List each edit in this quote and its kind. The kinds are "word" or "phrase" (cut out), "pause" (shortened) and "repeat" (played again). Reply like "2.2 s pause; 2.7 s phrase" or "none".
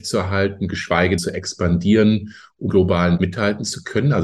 1.2 s word; 2.7 s word; 3.2 s word